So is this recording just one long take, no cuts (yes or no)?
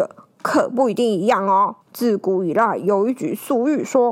no